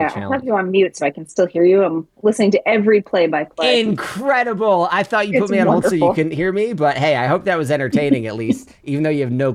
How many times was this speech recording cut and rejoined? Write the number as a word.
zero